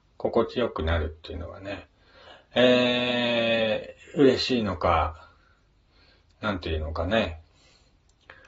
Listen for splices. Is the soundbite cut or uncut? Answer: uncut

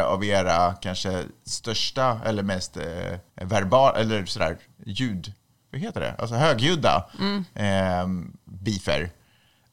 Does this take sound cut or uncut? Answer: cut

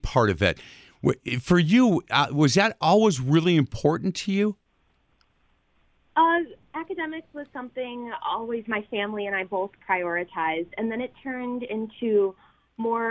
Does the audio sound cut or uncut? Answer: uncut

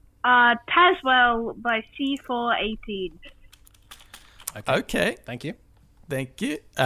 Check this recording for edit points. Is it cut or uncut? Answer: uncut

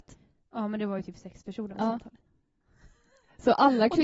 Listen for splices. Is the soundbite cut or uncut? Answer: uncut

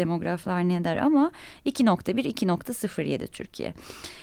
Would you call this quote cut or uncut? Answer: uncut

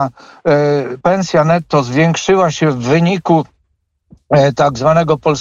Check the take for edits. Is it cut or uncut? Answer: cut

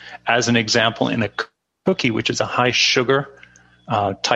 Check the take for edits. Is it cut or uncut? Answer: uncut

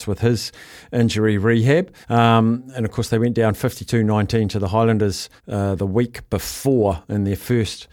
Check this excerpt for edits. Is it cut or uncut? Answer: cut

